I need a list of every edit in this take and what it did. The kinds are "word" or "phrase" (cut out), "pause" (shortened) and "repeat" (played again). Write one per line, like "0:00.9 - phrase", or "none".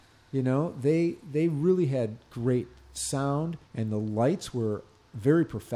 0:03.6 - pause